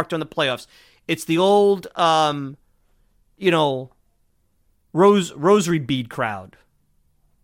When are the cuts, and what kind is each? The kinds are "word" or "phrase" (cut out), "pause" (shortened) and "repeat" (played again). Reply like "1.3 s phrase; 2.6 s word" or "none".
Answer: none

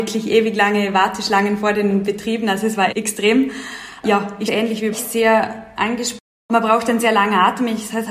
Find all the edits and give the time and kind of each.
2.9 s word; 4.5 s word; 4.9 s word

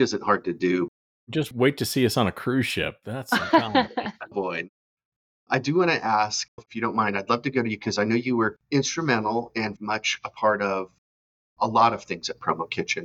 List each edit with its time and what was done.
4.3 s word; 6.6 s word; 9.8 s word

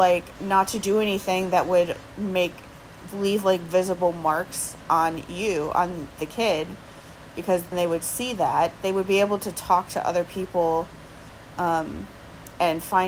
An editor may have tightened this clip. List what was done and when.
7.7 s word

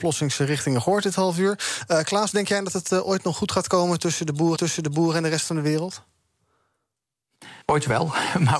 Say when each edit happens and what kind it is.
2.3 s phrase; 4.6 s repeat; 7.6 s pause

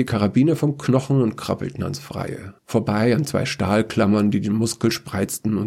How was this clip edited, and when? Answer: 2.6 s pause

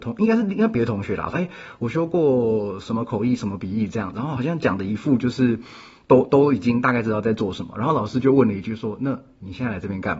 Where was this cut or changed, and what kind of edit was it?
1.3 s phrase

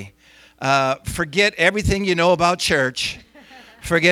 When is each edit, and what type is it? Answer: none

